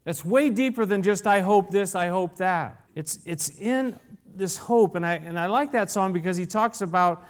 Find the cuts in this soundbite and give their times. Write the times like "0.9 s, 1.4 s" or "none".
2.9 s